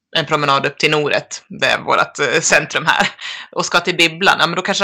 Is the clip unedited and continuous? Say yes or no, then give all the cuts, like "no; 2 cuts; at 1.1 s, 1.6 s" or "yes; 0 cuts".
no; 1 cut; at 1.6 s